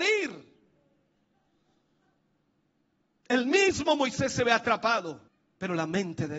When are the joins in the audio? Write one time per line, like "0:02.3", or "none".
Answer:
0:05.3